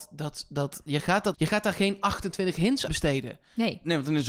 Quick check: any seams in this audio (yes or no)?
yes